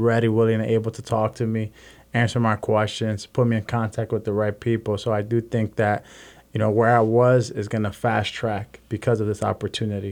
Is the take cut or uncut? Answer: uncut